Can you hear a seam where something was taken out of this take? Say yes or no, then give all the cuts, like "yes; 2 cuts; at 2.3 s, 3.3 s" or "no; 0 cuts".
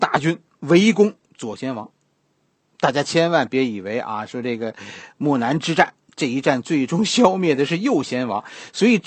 no; 0 cuts